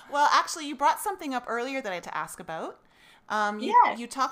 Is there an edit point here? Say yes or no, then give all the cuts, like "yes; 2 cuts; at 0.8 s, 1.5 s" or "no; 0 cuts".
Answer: yes; 1 cut; at 2.0 s